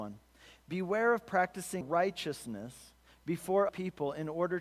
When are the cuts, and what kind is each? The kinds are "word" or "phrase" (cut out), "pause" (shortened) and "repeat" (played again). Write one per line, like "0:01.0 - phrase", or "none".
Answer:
0:01.8 - word
0:03.7 - word